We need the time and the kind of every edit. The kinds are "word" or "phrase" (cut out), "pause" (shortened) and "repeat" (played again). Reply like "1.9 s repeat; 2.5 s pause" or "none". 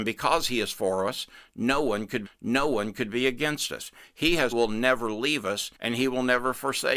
2.3 s repeat; 4.5 s phrase; 5.8 s pause